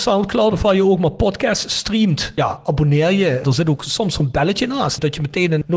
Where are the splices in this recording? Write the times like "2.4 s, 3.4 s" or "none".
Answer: none